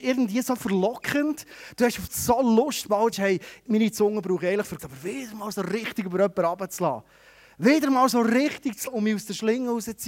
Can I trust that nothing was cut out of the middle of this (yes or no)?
no